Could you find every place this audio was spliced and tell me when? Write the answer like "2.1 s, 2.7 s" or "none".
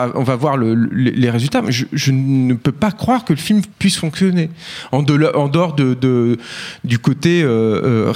3.7 s